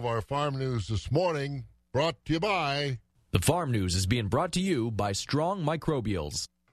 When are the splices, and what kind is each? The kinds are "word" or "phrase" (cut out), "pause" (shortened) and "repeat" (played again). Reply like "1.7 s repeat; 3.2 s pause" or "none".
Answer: none